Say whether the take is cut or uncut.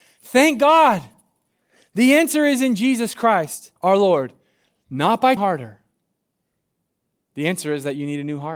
cut